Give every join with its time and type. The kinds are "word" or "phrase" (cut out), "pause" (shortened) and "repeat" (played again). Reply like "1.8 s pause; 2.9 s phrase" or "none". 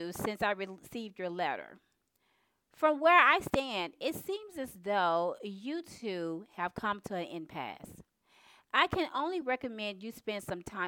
none